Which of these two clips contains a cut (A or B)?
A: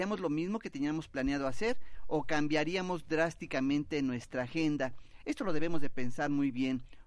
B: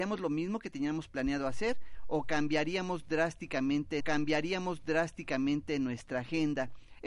B